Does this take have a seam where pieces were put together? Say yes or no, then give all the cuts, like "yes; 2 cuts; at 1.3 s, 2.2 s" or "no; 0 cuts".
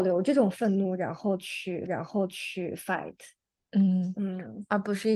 yes; 1 cut; at 1.9 s